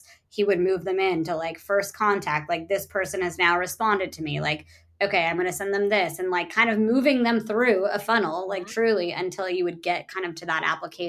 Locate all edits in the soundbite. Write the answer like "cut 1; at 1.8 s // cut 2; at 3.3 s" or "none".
none